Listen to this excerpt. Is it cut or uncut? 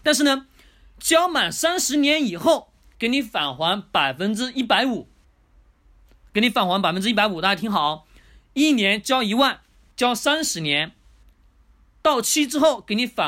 uncut